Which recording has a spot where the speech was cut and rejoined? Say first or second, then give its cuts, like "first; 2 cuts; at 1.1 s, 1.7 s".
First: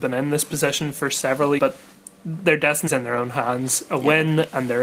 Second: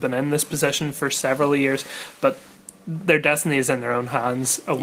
first; 2 cuts; at 1.6 s, 2.9 s